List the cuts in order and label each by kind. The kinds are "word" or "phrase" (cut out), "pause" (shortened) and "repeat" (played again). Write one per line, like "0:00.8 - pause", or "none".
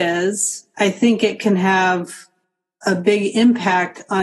none